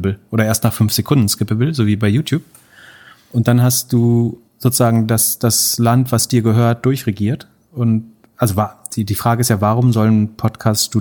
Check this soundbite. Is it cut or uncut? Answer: cut